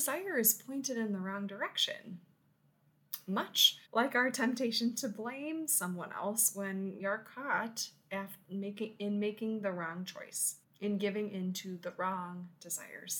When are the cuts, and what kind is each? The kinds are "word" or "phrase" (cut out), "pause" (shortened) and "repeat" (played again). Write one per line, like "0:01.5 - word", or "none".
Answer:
0:03.9 - pause
0:07.0 - word
0:10.6 - pause